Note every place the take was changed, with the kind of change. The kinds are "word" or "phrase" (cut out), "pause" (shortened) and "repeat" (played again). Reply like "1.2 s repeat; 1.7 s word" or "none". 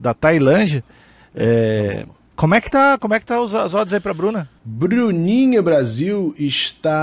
none